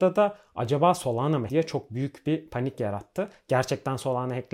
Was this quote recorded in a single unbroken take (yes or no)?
no